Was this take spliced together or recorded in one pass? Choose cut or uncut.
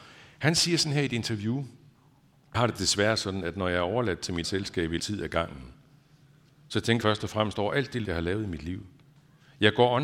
cut